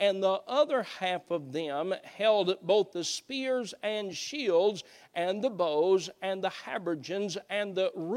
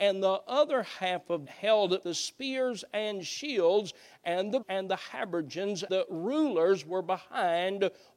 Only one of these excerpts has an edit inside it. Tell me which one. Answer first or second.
second